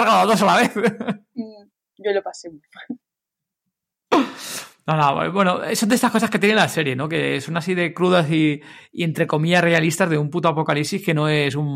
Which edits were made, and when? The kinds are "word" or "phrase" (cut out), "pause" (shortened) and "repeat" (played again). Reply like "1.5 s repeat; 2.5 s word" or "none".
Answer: none